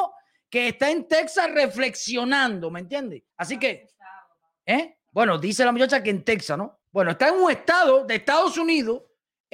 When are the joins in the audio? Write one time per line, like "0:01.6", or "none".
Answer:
0:03.3
0:05.0
0:06.8